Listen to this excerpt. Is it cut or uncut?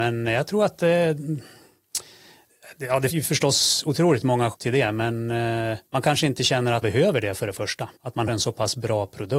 cut